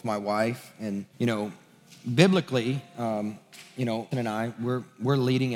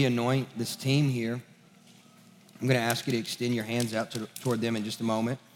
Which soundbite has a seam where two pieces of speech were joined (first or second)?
first